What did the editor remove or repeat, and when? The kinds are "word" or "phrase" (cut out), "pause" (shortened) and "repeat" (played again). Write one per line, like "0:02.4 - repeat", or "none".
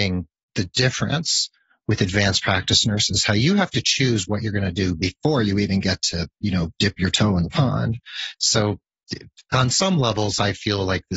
none